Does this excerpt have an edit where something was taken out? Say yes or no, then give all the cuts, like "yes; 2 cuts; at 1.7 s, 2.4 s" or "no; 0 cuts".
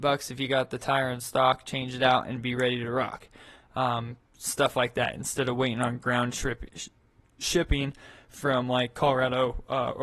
no; 0 cuts